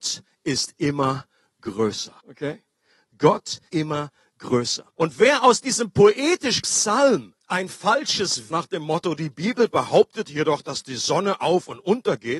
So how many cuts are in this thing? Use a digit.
6